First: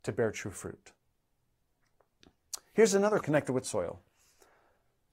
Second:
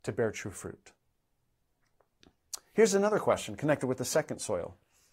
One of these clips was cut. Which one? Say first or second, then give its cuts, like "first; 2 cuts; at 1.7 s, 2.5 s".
first; 2 cuts; at 3.2 s, 3.6 s